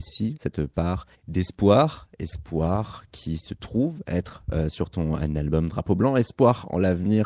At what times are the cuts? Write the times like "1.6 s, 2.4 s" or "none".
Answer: none